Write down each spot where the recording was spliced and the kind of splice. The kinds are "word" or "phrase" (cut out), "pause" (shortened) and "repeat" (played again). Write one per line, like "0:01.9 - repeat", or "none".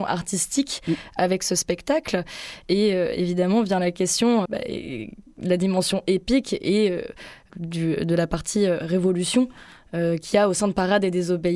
0:04.5 - word
0:07.5 - word